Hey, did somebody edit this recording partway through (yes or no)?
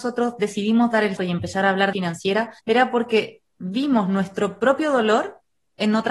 yes